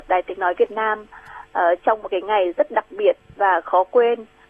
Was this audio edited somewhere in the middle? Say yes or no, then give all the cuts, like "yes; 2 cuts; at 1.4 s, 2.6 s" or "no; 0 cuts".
no; 0 cuts